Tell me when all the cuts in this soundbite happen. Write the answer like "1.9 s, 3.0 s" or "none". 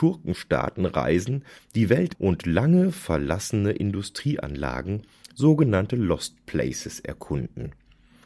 2.1 s